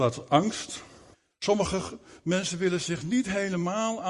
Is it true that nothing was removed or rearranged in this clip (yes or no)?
no